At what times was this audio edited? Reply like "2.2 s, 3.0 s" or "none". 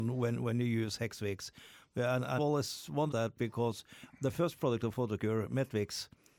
2.4 s, 3.1 s